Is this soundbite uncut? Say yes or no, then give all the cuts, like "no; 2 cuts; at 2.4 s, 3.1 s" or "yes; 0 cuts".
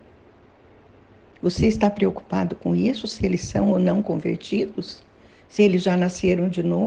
yes; 0 cuts